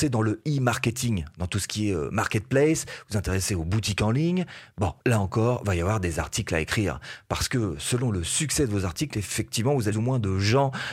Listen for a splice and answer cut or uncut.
cut